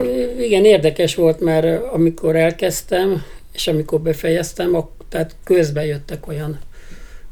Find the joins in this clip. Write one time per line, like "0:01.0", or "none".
none